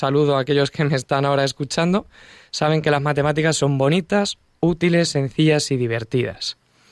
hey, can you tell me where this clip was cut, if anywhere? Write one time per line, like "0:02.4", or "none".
none

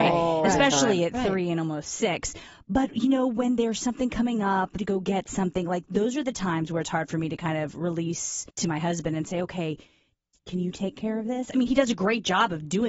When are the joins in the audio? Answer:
0:04.8
0:08.5

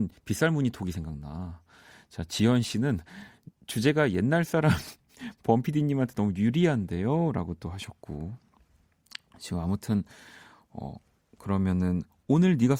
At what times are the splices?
none

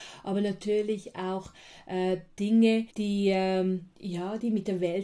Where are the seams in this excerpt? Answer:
0:02.9
0:03.9

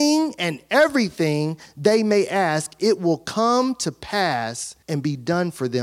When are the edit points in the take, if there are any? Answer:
0:04.8

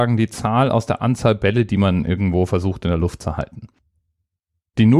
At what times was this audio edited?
none

